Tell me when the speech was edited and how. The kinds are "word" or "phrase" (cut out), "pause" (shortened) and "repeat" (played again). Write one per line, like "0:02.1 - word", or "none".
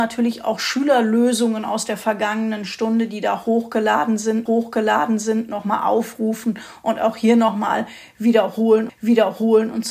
0:04.5 - repeat
0:08.9 - repeat

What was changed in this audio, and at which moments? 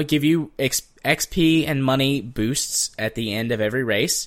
none

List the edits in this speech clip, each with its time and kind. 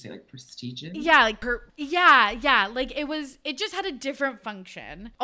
0:01.7 - pause

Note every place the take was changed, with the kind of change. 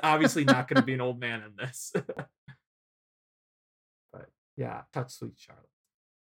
0:04.9 - word

